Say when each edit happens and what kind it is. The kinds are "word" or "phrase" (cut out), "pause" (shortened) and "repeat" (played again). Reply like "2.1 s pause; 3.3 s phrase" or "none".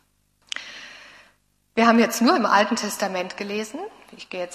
none